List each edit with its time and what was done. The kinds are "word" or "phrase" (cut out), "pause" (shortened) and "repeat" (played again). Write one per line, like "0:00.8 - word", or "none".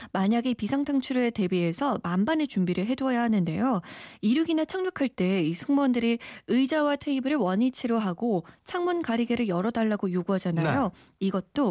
none